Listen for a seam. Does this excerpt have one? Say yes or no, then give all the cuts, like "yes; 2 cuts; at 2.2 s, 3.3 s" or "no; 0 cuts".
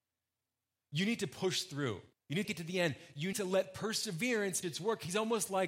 yes; 4 cuts; at 2.1 s, 2.4 s, 3.3 s, 4.6 s